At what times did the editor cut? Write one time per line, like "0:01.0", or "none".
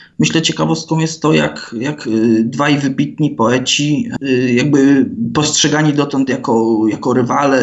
none